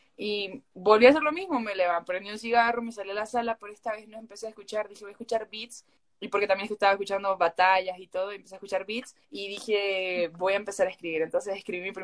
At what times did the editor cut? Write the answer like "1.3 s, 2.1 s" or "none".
6.0 s, 9.2 s